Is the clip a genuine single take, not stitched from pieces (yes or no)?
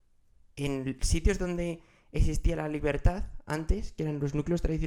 yes